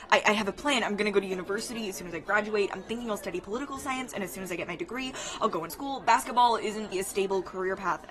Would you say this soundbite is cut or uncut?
cut